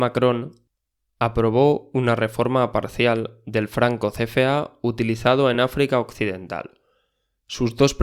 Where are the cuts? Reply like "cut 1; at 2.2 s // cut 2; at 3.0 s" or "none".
none